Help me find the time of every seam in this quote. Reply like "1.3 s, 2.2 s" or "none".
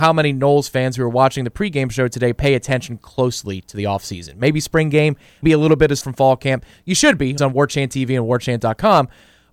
5.4 s, 6.0 s, 7.4 s